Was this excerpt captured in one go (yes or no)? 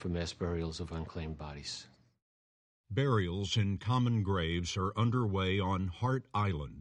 yes